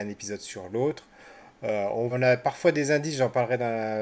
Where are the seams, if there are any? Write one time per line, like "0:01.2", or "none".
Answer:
0:02.1